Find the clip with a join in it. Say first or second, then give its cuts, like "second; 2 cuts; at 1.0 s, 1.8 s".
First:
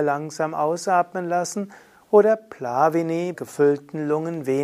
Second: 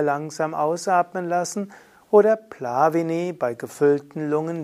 first; 1 cut; at 3.3 s